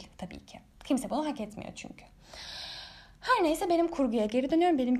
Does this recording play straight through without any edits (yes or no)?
yes